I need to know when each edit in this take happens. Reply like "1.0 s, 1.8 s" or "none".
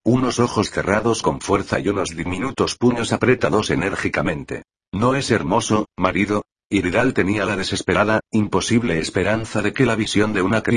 4.7 s, 6.5 s